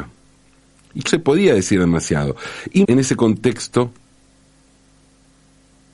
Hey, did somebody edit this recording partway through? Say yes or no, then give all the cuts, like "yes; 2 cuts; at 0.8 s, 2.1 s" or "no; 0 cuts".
yes; 2 cuts; at 1.1 s, 2.8 s